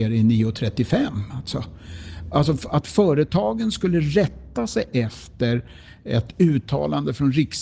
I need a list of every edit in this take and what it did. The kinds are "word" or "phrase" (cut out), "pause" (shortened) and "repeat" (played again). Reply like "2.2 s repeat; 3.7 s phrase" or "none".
none